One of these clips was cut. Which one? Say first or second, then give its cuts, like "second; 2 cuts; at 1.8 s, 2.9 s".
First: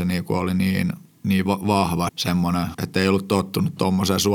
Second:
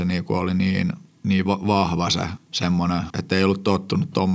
first; 1 cut; at 2.1 s